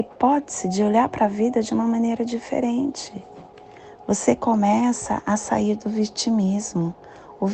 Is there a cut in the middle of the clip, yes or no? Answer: no